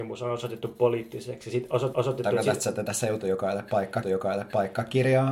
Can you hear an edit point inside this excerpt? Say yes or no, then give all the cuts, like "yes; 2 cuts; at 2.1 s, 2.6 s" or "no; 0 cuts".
yes; 2 cuts; at 1.9 s, 4.0 s